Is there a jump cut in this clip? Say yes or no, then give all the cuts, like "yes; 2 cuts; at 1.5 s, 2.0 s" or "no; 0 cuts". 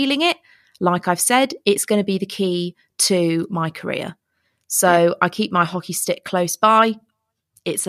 no; 0 cuts